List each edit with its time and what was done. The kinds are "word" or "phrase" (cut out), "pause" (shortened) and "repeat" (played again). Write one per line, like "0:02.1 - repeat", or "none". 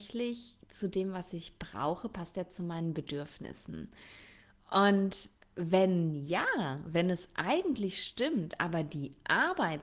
none